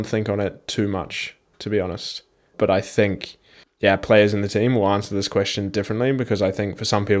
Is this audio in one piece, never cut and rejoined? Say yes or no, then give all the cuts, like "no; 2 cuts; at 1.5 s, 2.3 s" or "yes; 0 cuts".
no; 2 cuts; at 2.5 s, 3.6 s